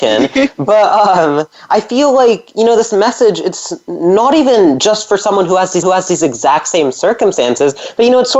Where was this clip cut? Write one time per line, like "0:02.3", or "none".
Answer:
0:05.8